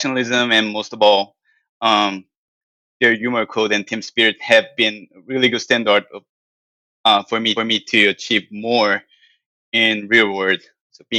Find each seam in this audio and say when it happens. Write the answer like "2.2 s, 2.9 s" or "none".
7.6 s